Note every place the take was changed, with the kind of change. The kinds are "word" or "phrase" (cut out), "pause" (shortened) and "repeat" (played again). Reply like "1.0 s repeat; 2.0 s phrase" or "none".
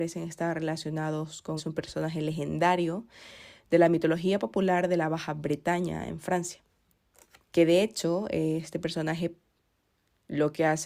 1.6 s phrase; 6.9 s pause